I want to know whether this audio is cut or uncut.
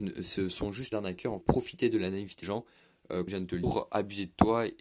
cut